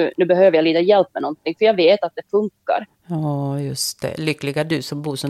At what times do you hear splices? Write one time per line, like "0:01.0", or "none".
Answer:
none